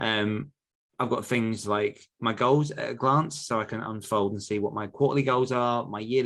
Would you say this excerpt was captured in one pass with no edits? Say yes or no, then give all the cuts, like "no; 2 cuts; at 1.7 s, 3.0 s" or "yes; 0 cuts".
yes; 0 cuts